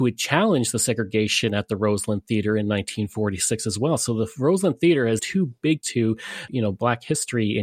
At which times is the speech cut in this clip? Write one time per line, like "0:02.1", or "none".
0:05.2
0:05.8
0:06.5